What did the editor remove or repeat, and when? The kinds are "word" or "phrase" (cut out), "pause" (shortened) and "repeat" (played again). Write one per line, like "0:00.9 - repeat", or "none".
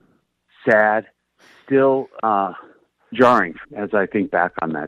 0:03.1 - word
0:03.6 - word